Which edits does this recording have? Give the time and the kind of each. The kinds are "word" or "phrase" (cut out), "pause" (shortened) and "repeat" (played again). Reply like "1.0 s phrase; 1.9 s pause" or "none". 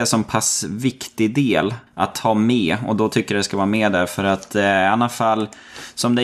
1.9 s pause